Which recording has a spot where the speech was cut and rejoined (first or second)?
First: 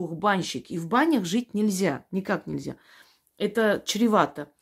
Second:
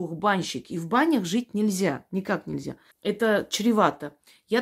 second